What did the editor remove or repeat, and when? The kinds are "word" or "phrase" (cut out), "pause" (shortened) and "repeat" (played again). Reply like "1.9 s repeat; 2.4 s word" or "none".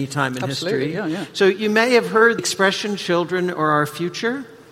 2.4 s word